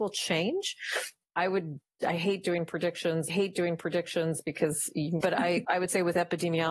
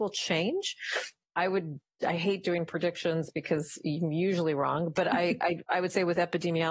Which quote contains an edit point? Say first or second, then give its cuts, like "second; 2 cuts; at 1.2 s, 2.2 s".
first; 3 cuts; at 3.3 s, 5.2 s, 5.6 s